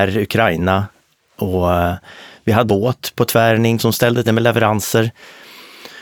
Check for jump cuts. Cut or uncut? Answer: cut